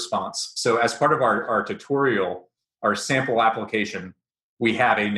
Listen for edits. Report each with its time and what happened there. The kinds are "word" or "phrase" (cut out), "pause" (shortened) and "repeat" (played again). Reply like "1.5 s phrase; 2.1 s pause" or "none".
none

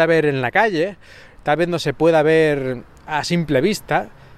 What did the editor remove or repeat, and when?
none

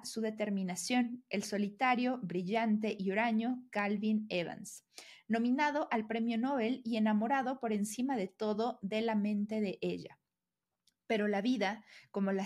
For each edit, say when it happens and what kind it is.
none

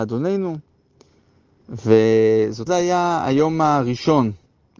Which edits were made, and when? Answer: 2.7 s word

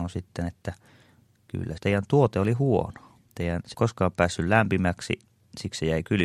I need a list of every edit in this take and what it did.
1.8 s phrase; 3.3 s pause; 3.7 s phrase

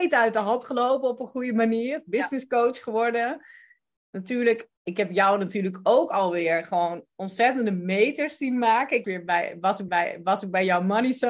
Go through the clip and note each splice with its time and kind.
4.8 s pause; 9.0 s phrase; 9.9 s repeat

